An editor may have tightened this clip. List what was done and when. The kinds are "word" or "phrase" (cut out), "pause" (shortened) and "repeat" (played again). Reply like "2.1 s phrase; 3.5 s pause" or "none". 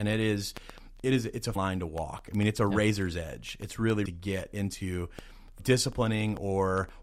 1.6 s word; 4.1 s phrase; 5.6 s word